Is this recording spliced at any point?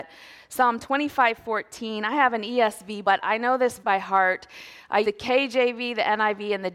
yes; 3 cuts; at 3.0 s, 3.8 s, 5.0 s

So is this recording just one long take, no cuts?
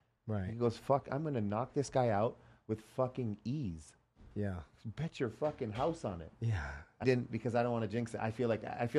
no; 1 cut; at 7.0 s

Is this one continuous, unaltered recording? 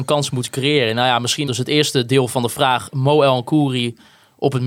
no; 1 cut; at 1.5 s

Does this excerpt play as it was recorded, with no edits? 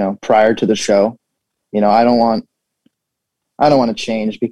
yes; 0 cuts

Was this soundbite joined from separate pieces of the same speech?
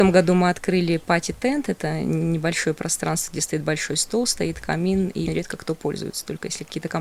yes; 1 cut; at 5.3 s

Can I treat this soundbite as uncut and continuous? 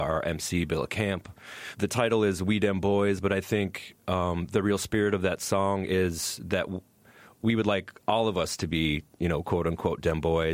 yes; 0 cuts

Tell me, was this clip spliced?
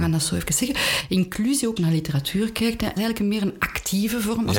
yes; 2 cuts; at 1.8 s, 3.0 s

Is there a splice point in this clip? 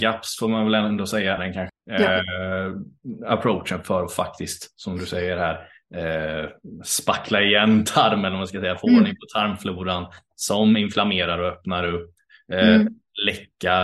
yes; 2 cuts; at 1.4 s, 1.7 s

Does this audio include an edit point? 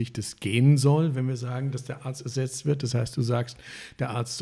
no; 0 cuts

